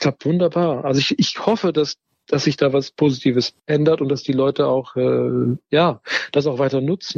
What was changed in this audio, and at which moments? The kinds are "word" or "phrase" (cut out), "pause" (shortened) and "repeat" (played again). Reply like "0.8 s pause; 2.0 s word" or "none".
3.6 s pause